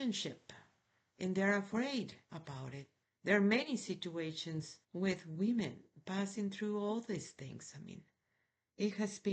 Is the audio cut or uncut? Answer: cut